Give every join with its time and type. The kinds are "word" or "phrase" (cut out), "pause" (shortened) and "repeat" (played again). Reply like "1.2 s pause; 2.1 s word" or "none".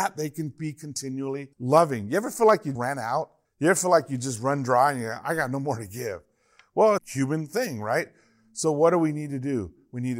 1.5 s pause; 2.8 s word; 3.4 s pause; 7.0 s phrase